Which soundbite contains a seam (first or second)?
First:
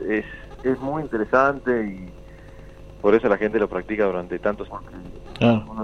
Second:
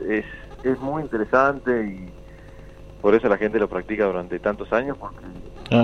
first